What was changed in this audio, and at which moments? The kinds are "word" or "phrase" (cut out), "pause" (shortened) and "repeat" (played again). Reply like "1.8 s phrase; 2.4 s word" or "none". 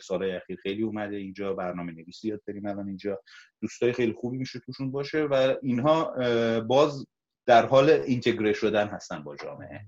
none